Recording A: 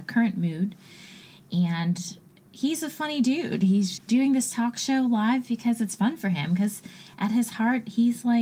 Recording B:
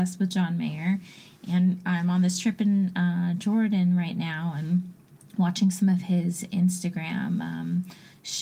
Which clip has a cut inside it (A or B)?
A